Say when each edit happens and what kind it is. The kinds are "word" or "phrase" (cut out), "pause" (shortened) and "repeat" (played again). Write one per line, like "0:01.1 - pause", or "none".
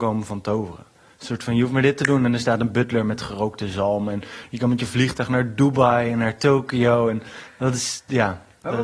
none